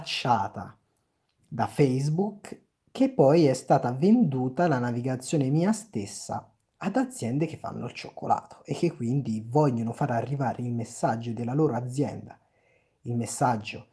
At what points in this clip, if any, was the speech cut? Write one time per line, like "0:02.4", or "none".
none